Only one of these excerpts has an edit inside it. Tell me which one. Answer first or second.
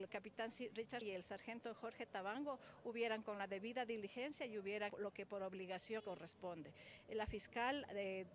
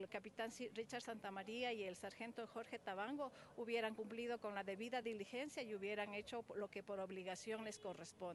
first